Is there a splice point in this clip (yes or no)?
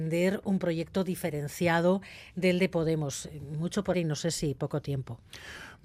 yes